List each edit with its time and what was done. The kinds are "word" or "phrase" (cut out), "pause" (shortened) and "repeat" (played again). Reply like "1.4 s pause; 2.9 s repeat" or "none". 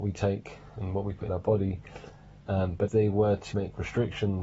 1.3 s word; 2.9 s word; 3.5 s word